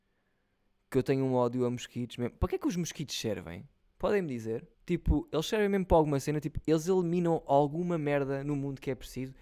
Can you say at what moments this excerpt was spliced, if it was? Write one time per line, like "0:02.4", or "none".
0:03.8
0:04.7